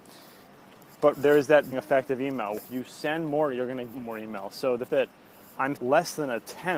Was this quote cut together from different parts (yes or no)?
yes